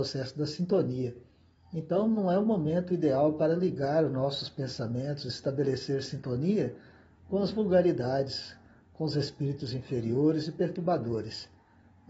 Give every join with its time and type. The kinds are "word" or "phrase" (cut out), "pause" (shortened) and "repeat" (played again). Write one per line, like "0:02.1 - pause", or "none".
none